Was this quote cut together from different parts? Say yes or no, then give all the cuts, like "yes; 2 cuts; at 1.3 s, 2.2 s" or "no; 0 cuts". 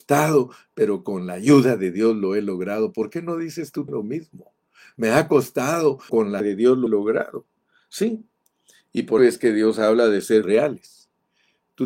yes; 6 cuts; at 3.9 s, 6.1 s, 6.4 s, 6.9 s, 9.2 s, 10.4 s